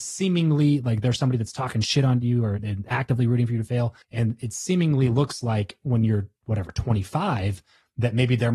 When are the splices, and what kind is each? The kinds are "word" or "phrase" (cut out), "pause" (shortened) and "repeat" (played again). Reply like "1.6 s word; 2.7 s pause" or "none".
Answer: 4.0 s pause; 6.4 s pause